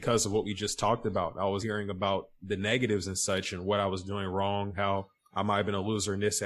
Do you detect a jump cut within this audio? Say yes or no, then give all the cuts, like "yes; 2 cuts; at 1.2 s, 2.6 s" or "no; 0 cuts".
yes; 2 cuts; at 1.6 s, 5.2 s